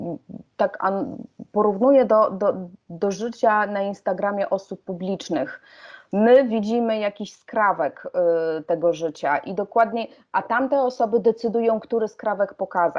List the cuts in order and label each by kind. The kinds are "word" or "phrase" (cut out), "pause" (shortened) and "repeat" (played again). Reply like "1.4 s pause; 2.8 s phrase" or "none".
none